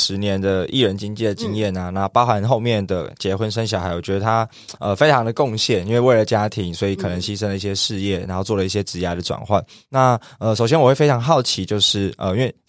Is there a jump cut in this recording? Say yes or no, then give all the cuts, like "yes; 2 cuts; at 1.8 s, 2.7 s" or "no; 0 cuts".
no; 0 cuts